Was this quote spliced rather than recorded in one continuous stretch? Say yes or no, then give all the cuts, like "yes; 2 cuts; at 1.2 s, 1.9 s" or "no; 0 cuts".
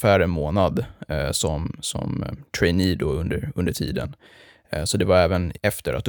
no; 0 cuts